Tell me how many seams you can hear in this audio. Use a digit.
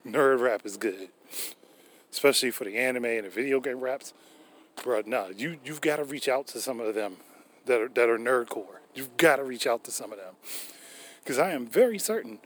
1